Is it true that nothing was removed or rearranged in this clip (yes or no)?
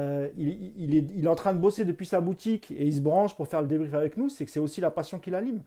yes